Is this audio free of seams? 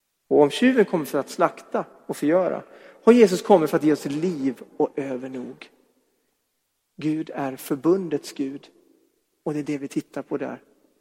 yes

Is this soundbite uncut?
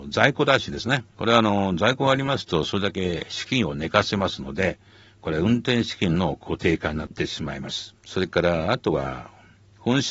no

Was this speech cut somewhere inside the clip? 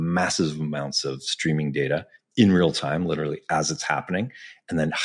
no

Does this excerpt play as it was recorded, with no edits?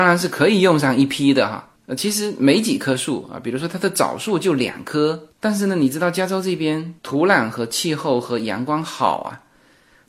no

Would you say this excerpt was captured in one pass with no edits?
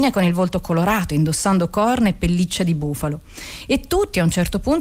yes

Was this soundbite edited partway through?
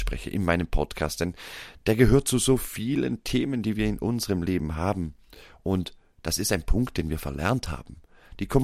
no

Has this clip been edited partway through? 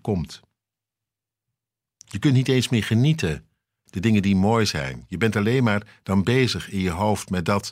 yes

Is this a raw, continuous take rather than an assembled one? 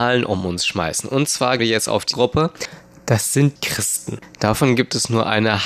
no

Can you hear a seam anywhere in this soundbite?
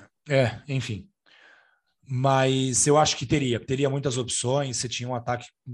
no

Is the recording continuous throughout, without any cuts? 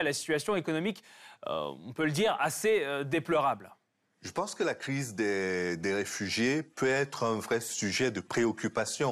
yes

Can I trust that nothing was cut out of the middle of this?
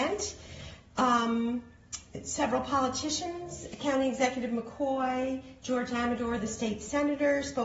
yes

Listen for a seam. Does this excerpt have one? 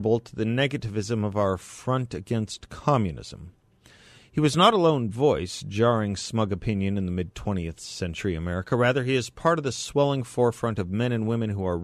no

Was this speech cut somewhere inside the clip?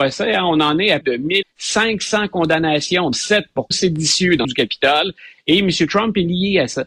yes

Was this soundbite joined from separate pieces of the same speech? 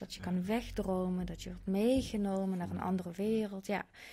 no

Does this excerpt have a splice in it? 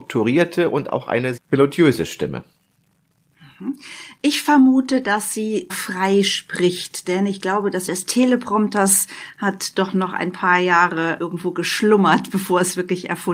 yes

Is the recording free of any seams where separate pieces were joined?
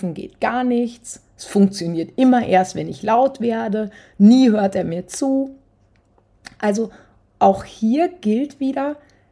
yes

